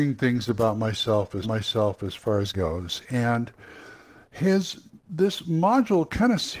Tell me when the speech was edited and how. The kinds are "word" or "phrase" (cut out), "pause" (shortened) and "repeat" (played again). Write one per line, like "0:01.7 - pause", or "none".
0:01.4 - repeat
0:02.5 - word
0:05.0 - pause